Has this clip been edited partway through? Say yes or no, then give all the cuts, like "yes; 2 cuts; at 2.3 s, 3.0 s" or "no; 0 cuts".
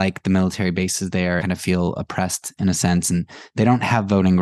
yes; 1 cut; at 1.4 s